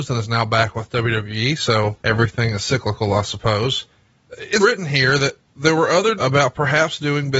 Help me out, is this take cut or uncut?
cut